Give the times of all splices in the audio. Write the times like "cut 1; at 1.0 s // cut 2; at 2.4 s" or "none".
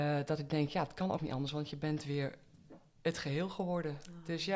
cut 1; at 1.2 s